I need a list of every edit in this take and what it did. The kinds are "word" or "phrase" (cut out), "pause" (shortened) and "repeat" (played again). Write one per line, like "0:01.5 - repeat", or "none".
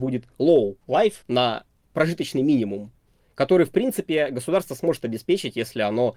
0:01.2 - pause